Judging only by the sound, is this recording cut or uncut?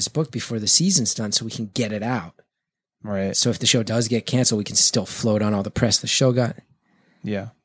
uncut